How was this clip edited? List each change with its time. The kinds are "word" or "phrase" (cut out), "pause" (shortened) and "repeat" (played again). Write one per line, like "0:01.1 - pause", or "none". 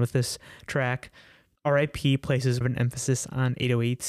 0:02.6 - word